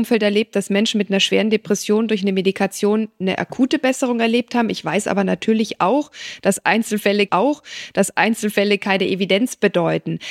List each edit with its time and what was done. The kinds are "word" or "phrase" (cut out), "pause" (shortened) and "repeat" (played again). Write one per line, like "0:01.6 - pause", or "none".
0:07.3 - repeat